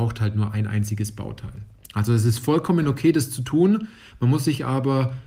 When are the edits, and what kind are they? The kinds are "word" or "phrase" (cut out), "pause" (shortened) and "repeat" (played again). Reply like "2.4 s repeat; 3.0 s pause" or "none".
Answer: none